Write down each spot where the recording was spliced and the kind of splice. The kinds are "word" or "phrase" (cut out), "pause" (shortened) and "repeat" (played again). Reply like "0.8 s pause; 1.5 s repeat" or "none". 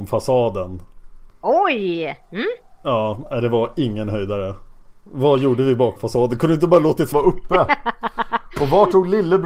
6.0 s word; 7.1 s word